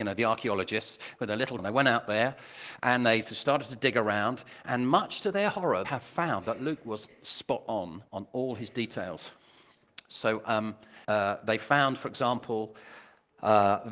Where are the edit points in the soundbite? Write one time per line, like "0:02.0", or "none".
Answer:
0:01.6
0:05.8
0:08.1
0:11.0